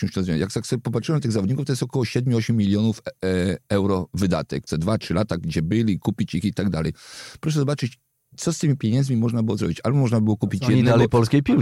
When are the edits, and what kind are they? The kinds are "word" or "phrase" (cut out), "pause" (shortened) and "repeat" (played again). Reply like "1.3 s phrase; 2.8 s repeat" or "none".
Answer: 4.7 s word